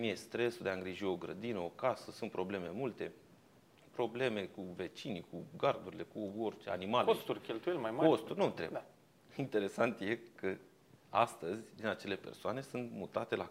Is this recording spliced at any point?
no; 0 cuts

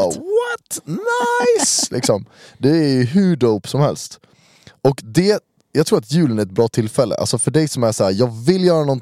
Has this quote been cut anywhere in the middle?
no; 0 cuts

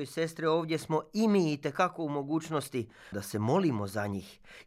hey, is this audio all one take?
no; 1 cut; at 3.1 s

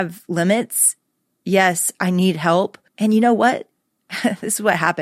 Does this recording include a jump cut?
yes; 1 cut; at 2.9 s

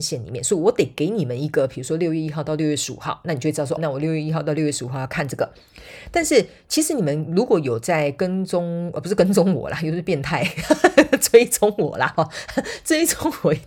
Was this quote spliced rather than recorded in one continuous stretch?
yes; 1 cut; at 3.8 s

